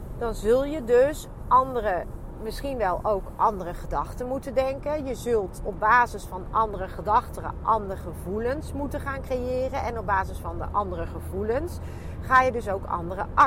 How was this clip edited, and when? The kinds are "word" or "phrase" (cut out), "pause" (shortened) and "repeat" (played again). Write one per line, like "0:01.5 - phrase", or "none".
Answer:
none